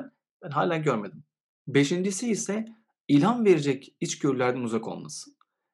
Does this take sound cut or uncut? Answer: uncut